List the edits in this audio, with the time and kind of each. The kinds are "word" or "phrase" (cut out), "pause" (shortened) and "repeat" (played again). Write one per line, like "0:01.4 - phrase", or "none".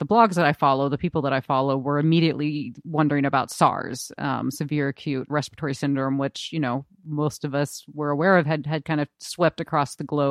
0:05.3 - word